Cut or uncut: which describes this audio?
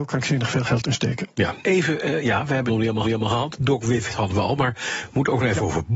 cut